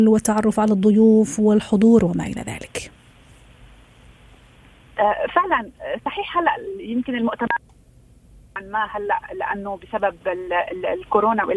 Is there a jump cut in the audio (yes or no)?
no